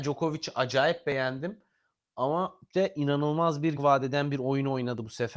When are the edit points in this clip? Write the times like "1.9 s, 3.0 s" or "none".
2.7 s, 3.8 s